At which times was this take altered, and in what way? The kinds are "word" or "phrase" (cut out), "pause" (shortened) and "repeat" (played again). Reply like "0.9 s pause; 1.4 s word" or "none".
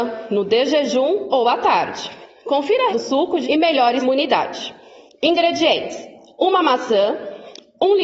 2.9 s word; 3.4 s word; 4.0 s word